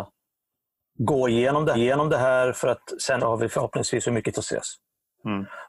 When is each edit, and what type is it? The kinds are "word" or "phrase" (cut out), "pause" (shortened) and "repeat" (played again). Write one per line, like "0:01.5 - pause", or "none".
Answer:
0:01.7 - repeat
0:03.2 - phrase
0:04.3 - phrase